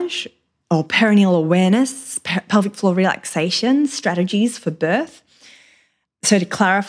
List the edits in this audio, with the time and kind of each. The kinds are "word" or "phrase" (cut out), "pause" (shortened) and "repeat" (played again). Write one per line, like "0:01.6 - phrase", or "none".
none